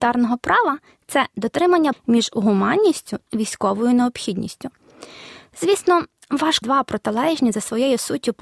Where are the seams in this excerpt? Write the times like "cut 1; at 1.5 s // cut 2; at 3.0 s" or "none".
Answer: cut 1; at 1.9 s // cut 2; at 3.3 s // cut 3; at 6.6 s